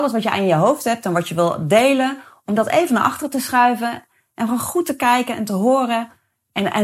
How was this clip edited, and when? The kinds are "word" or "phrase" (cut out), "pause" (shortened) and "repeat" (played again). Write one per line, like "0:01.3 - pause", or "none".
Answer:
none